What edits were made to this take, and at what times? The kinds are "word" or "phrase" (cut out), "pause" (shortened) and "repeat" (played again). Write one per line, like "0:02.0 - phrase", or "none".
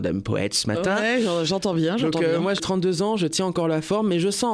0:02.6 - phrase